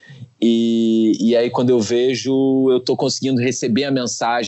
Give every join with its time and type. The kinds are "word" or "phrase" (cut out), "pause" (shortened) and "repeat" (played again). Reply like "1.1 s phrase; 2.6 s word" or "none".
none